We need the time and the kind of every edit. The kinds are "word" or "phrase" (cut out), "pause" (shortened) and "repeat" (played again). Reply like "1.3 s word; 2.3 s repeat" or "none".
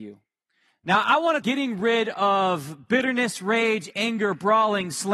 1.4 s phrase